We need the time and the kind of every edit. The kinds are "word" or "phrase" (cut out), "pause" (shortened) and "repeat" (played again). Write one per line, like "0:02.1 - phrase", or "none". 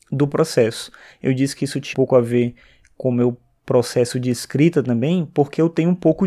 0:01.9 - word